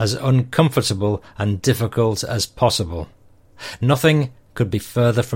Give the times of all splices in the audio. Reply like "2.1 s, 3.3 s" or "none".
none